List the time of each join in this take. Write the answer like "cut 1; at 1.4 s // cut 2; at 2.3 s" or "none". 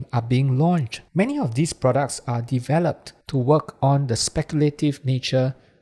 cut 1; at 1.1 s // cut 2; at 3.2 s

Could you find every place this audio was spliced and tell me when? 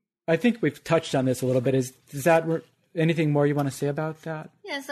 none

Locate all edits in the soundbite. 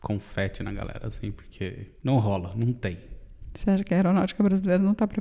cut 1; at 2.0 s

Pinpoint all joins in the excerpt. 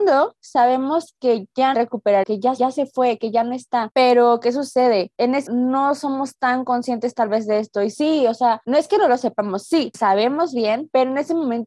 cut 1; at 1.7 s // cut 2; at 2.2 s // cut 3; at 2.6 s // cut 4; at 5.5 s // cut 5; at 9.9 s

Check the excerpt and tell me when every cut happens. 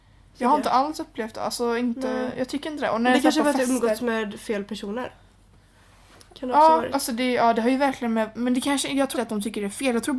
cut 1; at 9.1 s

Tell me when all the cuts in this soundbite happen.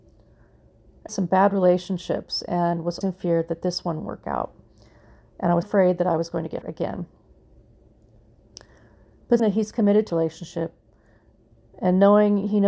cut 1; at 1.1 s // cut 2; at 3.0 s // cut 3; at 4.0 s // cut 4; at 5.6 s // cut 5; at 6.6 s // cut 6; at 9.4 s // cut 7; at 10.1 s

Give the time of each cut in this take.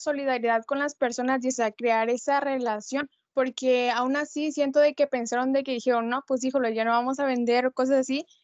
cut 1; at 1.5 s

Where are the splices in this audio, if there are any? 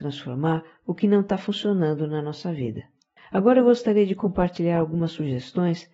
cut 1; at 3.2 s

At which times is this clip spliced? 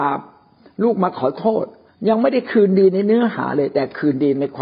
cut 1; at 1.9 s

